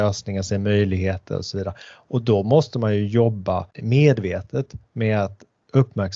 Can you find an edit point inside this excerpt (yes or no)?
yes